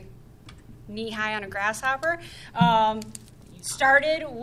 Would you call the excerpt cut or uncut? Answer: uncut